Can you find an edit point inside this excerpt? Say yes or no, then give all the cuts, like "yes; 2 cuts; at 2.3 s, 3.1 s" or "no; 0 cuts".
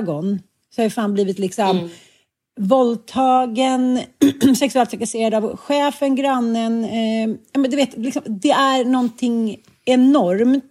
no; 0 cuts